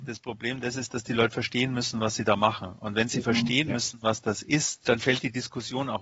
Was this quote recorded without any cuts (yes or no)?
yes